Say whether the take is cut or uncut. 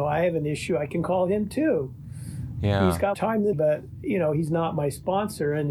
cut